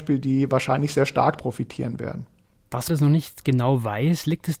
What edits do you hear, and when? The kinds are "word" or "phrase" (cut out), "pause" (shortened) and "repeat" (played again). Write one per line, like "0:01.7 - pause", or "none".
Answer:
0:01.4 - word
0:02.9 - word